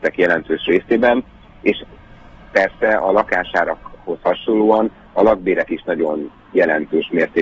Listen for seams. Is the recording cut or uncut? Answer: uncut